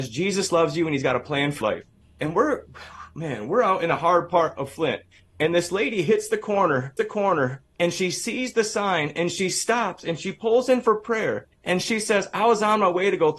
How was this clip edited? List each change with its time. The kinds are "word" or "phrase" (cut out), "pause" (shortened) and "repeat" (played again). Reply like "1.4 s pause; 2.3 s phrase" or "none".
1.6 s word; 7.0 s repeat; 11.5 s pause